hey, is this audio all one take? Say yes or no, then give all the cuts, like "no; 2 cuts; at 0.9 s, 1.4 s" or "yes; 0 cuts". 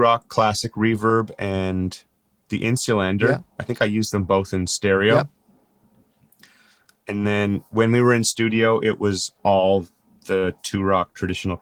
yes; 0 cuts